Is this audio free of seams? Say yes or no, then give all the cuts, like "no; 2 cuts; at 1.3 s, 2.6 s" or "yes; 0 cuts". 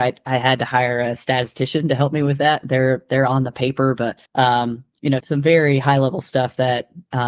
no; 2 cuts; at 4.2 s, 5.2 s